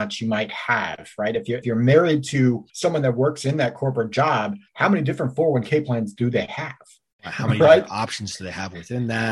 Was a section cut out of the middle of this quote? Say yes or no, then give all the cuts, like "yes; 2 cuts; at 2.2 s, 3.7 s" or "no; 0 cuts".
yes; 4 cuts; at 1.6 s, 2.7 s, 4.7 s, 7.2 s